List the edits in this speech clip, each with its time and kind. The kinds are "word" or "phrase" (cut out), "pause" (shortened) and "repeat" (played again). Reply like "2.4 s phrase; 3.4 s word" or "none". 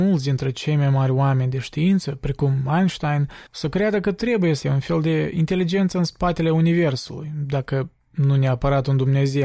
3.5 s pause; 4.6 s word